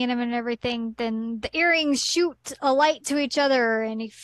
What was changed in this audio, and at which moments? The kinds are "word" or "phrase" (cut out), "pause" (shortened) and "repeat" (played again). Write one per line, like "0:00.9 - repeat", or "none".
none

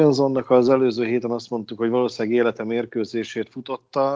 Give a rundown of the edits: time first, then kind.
none

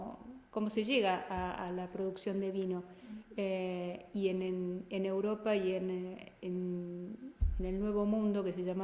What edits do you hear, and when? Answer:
none

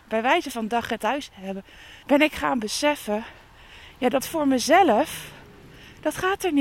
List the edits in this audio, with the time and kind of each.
0:01.0 - word
0:02.0 - pause
0:04.2 - word

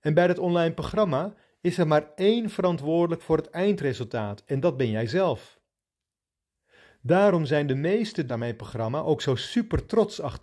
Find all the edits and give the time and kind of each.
0:08.3 - word

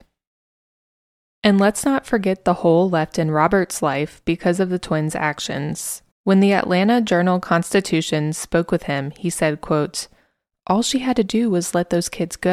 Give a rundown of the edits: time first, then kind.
0:06.1 - pause

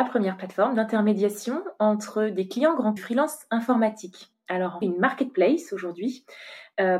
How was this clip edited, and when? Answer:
0:03.0 - phrase
0:04.8 - phrase

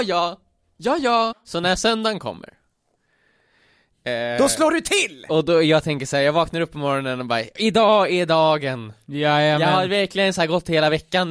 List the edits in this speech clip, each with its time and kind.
none

